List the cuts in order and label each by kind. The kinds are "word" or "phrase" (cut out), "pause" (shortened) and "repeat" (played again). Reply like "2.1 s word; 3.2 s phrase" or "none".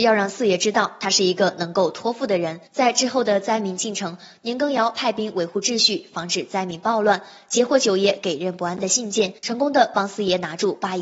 2.7 s pause; 9.4 s pause

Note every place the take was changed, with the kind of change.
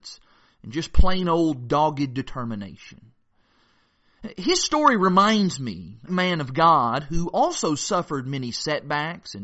6.1 s phrase

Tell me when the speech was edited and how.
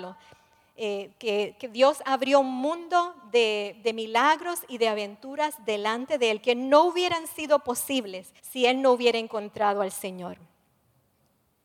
8.4 s pause

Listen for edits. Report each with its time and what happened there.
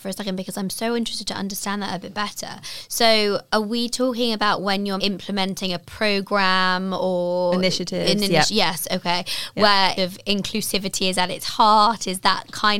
5.0 s word; 10.0 s phrase

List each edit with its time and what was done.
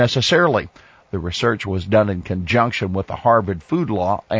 none

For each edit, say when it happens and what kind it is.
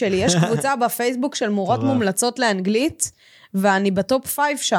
none

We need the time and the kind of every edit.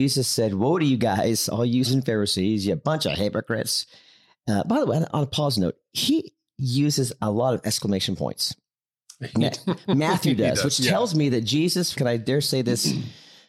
1.8 s word; 5.1 s word; 11.9 s word

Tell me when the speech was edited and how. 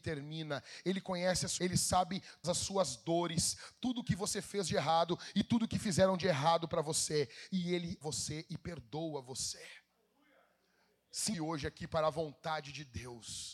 1.6 s word; 2.4 s word; 8.0 s word; 11.3 s word

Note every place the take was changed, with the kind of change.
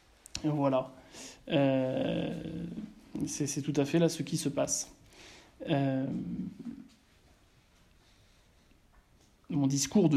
none

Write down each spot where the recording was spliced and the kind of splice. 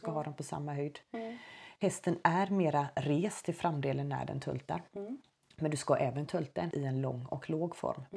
6.3 s word; 6.7 s word

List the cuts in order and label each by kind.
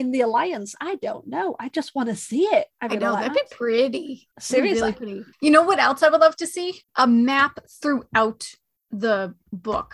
2.7 s pause; 4.3 s pause; 5.3 s pause; 6.9 s pause

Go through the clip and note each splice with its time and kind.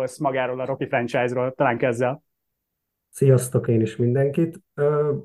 1.8 s word; 3.7 s word

